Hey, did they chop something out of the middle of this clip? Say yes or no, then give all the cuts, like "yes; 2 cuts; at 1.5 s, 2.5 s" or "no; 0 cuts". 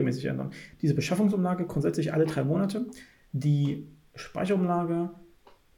no; 0 cuts